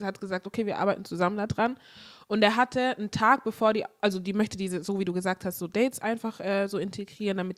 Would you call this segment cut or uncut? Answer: uncut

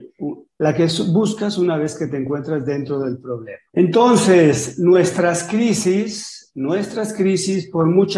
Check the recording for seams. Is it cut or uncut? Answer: cut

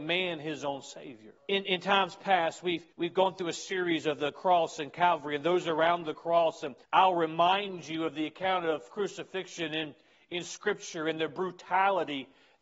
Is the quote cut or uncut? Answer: cut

